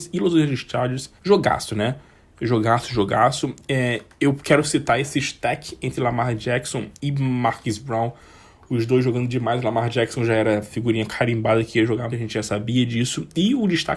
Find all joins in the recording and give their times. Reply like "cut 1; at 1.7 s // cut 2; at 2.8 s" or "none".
cut 1; at 1.2 s // cut 2; at 7.0 s // cut 3; at 12.1 s